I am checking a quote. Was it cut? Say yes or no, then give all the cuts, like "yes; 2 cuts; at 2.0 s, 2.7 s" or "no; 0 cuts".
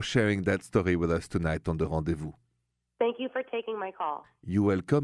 no; 0 cuts